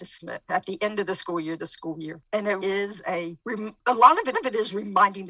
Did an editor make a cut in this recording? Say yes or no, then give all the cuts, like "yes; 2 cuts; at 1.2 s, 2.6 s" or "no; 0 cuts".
yes; 3 cuts; at 1.6 s, 2.6 s, 4.3 s